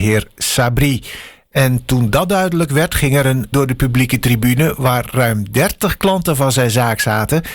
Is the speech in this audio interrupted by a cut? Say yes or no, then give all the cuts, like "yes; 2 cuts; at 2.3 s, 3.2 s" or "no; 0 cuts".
yes; 1 cut; at 3.5 s